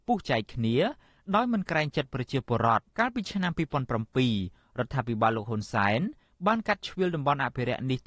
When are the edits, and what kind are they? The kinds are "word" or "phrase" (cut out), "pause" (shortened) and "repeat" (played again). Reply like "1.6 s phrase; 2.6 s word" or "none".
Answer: 2.9 s pause